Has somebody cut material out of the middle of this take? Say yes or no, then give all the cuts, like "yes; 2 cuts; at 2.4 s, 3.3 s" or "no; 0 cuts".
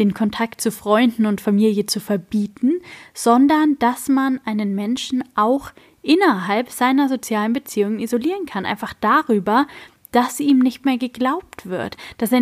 no; 0 cuts